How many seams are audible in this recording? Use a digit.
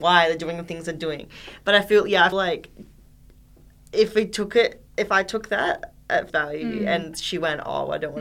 3